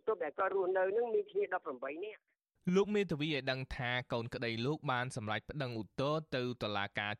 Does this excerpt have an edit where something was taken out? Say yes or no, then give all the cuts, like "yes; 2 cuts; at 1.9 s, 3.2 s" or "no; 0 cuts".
no; 0 cuts